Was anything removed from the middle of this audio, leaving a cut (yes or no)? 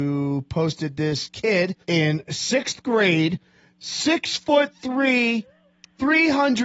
yes